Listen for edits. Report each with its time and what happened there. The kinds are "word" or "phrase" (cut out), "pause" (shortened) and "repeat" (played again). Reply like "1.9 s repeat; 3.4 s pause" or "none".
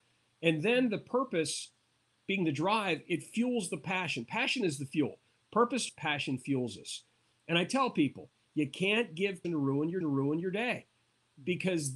3.1 s word; 5.9 s phrase; 9.4 s phrase; 10.0 s repeat